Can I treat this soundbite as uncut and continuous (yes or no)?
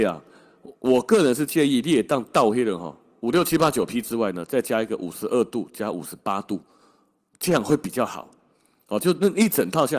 yes